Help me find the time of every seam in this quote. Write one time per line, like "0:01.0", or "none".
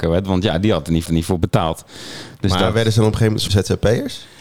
0:01.1
0:03.5